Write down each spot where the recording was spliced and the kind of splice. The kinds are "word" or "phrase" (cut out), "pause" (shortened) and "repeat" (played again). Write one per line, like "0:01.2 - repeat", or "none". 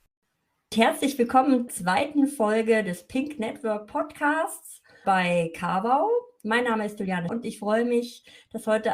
0:01.7 - word
0:05.0 - word
0:07.3 - word